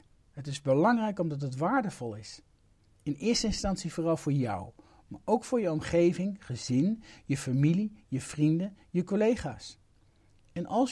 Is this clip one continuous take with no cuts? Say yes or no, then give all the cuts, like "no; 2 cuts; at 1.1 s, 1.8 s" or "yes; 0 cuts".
yes; 0 cuts